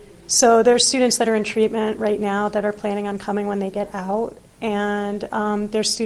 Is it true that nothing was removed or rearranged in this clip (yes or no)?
yes